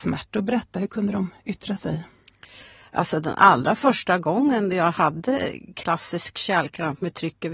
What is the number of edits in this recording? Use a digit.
0